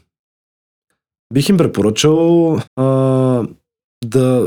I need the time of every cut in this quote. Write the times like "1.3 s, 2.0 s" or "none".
2.7 s